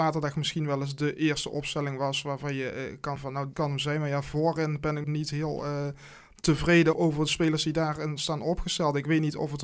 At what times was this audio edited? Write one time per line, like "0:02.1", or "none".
0:03.2
0:03.5
0:05.0
0:06.9